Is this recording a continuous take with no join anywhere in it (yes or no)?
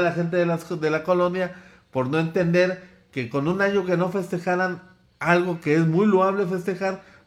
yes